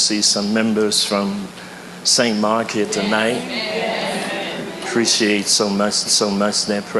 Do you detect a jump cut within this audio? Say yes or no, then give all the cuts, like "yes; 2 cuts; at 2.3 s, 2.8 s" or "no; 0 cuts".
yes; 1 cut; at 6.0 s